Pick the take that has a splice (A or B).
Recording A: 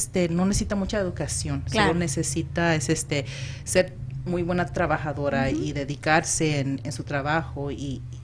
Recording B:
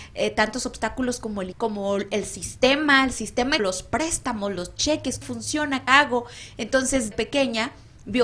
B